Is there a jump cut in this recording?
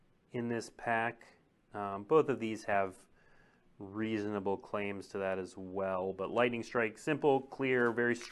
no; 0 cuts

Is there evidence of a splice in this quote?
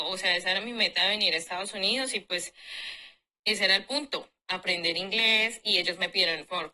no; 0 cuts

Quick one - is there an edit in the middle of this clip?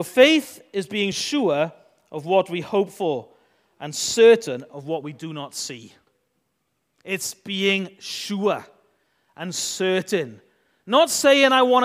no; 0 cuts

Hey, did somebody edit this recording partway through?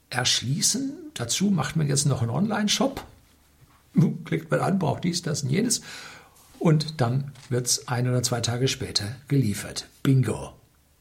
no; 0 cuts

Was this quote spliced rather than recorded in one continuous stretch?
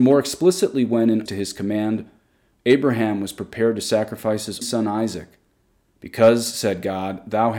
yes; 2 cuts; at 1.3 s, 4.6 s

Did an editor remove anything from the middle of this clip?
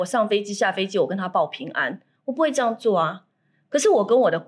no; 0 cuts

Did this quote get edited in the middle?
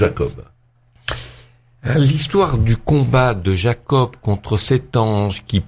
no; 0 cuts

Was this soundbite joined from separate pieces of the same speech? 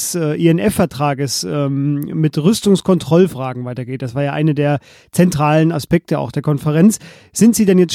no; 0 cuts

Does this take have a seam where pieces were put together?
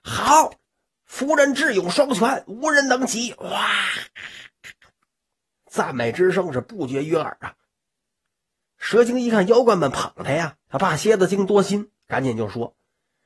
yes; 2 cuts; at 10.6 s, 12.0 s

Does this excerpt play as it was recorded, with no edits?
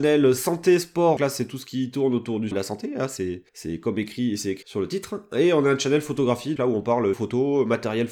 no; 6 cuts; at 1.2 s, 2.5 s, 3.5 s, 4.6 s, 6.6 s, 7.1 s

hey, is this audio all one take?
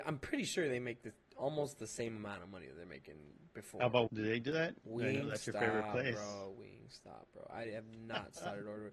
no; 1 cut; at 4.1 s

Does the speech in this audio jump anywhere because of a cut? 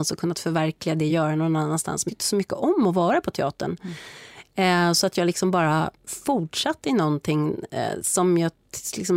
yes; 2 cuts; at 1.1 s, 2.1 s

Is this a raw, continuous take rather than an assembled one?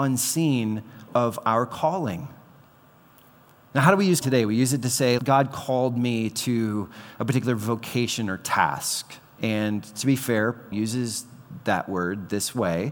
no; 4 cuts; at 1.1 s, 4.2 s, 5.2 s, 10.7 s

